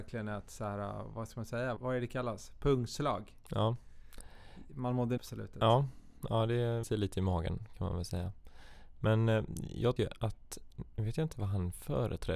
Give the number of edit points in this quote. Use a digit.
4